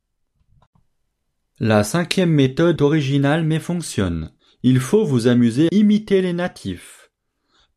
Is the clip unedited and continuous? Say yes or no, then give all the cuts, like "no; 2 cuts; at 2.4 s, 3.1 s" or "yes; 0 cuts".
no; 3 cuts; at 2.8 s, 4.4 s, 5.7 s